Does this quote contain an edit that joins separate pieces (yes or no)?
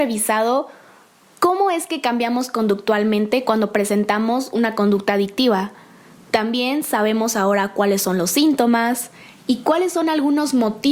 no